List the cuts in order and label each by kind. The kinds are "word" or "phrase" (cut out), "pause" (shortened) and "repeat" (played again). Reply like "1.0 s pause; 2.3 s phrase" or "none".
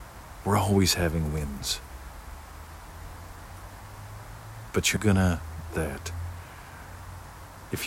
5.0 s word; 5.7 s word